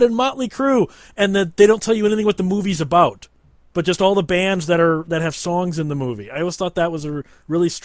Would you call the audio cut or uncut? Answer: uncut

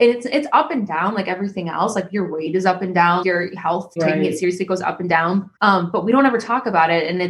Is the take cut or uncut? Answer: cut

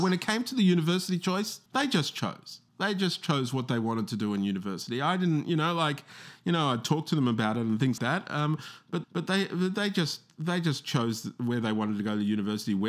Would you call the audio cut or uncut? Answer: cut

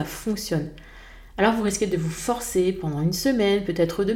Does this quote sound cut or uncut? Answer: uncut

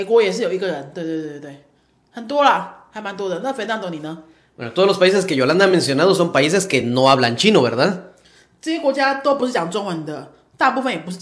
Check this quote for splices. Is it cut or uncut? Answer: uncut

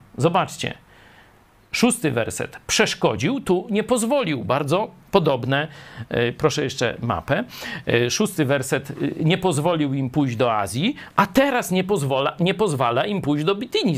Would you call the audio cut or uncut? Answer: uncut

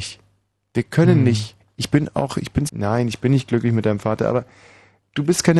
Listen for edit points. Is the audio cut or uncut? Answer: cut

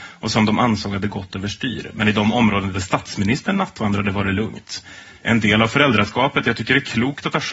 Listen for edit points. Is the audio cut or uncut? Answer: uncut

